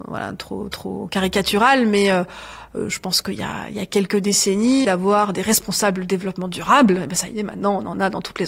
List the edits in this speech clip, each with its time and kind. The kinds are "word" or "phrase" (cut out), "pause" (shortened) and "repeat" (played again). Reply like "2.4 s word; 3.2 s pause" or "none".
4.8 s phrase